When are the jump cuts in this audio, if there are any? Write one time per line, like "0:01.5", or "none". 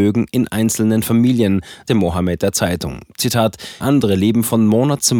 0:01.9
0:03.8